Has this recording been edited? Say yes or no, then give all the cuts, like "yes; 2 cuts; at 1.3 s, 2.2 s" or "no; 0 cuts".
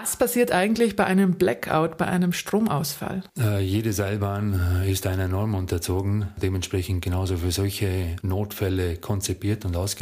yes; 1 cut; at 3.3 s